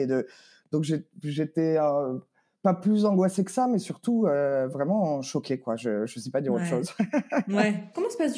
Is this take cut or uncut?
uncut